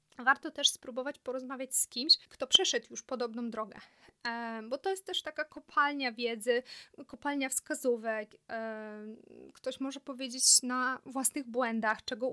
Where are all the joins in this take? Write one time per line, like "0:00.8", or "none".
0:02.2